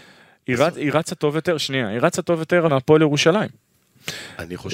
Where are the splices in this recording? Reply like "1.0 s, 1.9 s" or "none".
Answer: 2.7 s